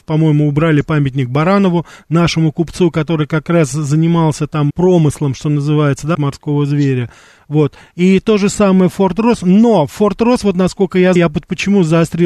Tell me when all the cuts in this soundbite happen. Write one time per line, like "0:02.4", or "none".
0:04.7
0:06.1
0:11.2